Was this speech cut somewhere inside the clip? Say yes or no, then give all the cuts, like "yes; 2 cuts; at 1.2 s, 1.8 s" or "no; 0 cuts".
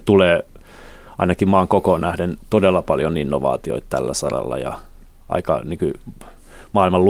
no; 0 cuts